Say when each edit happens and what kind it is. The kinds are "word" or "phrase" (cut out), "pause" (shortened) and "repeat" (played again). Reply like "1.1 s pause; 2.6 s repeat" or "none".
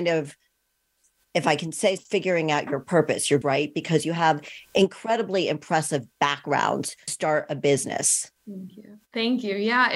2.0 s word; 3.4 s phrase; 7.1 s word; 8.4 s pause